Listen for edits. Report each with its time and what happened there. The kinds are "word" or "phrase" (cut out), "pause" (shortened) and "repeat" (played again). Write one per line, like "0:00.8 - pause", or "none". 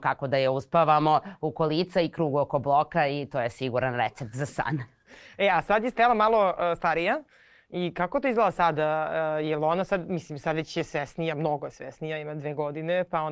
none

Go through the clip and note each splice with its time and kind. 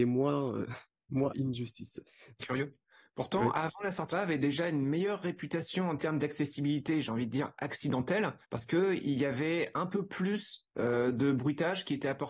0:01.3 - phrase
0:02.4 - phrase
0:04.1 - phrase
0:08.4 - pause

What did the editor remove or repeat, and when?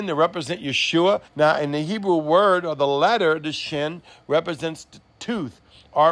0:01.3 - pause

